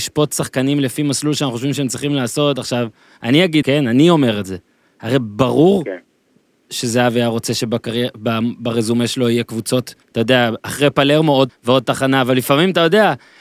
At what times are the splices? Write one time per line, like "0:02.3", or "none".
0:03.6
0:10.0
0:11.5